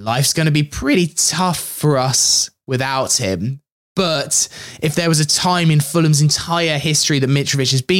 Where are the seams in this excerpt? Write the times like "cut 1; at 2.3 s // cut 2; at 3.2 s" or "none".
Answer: none